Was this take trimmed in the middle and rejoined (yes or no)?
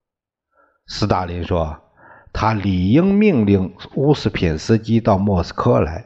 no